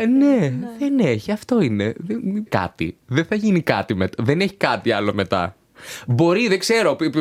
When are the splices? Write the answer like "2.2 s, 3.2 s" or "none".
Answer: 2.5 s